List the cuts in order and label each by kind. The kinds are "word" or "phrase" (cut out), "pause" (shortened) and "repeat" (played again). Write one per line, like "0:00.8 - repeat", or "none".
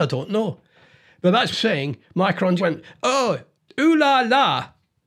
0:01.5 - phrase
0:02.6 - word

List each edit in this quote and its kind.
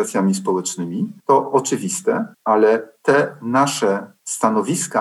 0:01.2 - pause
0:02.3 - pause

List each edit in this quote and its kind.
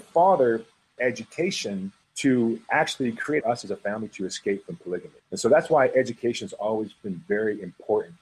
0:01.0 - word
0:02.0 - pause
0:03.4 - phrase
0:05.2 - pause

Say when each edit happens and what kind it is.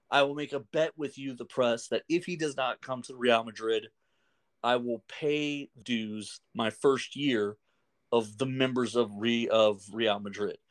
0:05.8 - word

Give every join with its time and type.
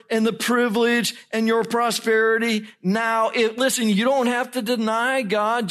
none

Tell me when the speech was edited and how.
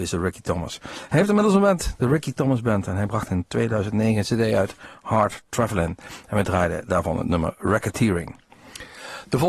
none

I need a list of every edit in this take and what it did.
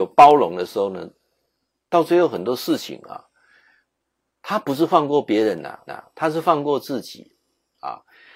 0:05.9 - repeat

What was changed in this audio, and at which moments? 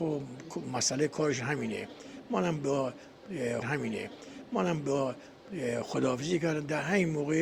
0:03.6 - repeat

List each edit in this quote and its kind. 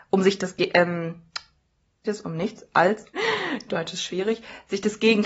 0:02.0 - word
0:02.7 - word
0:03.1 - word

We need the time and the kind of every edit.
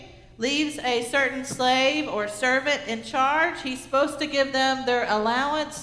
none

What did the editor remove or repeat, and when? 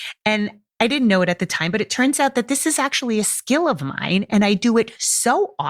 none

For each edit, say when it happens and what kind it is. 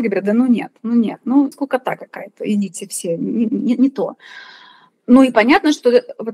0:01.5 - word

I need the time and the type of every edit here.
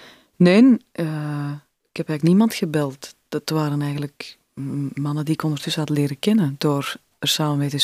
none

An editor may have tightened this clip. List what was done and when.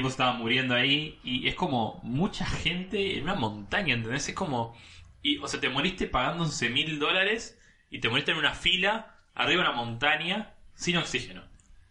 none

